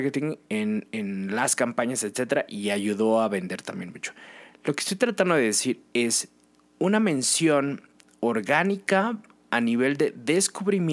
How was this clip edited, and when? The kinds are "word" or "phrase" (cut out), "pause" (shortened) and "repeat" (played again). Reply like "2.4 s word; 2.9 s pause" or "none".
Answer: none